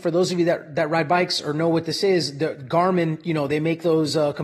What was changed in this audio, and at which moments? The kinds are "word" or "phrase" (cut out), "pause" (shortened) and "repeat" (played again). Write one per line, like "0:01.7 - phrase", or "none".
none